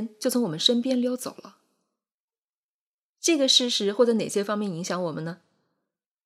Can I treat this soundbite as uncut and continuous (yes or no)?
yes